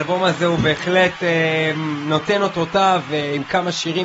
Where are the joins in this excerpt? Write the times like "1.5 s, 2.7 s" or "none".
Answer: none